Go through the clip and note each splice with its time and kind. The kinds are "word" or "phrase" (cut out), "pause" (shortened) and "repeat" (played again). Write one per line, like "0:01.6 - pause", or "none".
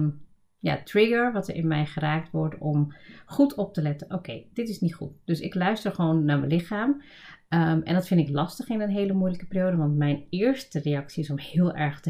none